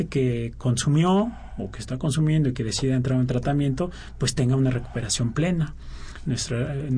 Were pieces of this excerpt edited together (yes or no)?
no